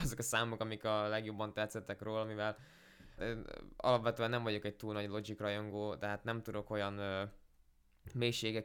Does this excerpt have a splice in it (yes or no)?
yes